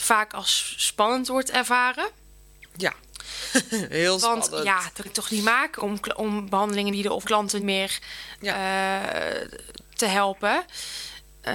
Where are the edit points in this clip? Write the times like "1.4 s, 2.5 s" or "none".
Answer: 5.1 s, 5.8 s, 6.9 s, 7.2 s, 7.6 s